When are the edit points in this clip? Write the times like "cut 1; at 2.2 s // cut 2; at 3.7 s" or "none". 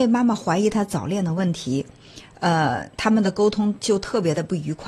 cut 1; at 2.9 s